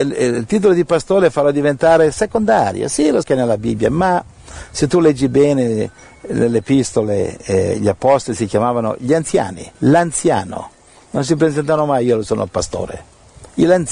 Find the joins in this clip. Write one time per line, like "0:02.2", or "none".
0:03.2
0:09.7

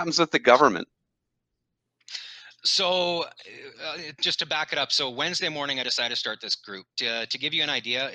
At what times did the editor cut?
0:03.7
0:06.9

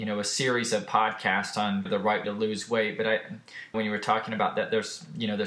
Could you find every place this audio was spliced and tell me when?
0:01.9
0:02.2
0:03.7

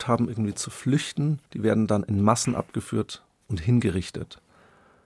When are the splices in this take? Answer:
0:01.5

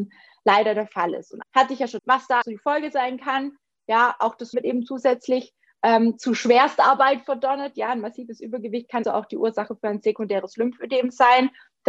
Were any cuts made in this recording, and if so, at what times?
0:01.4
0:02.0
0:02.4
0:04.5
0:09.0

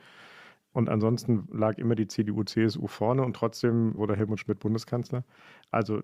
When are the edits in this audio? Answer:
0:04.0

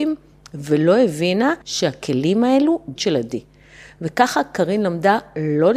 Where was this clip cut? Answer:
0:01.6
0:03.0

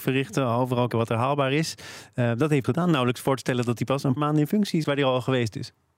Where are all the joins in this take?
0:00.9
0:02.6
0:04.2
0:04.8

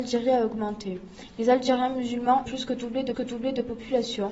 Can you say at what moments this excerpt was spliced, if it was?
0:02.5
0:03.1

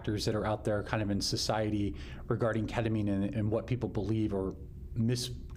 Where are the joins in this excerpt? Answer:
0:03.3

